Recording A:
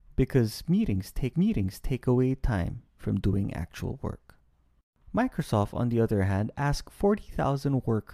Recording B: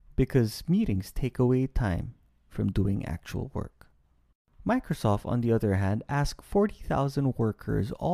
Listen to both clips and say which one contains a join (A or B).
A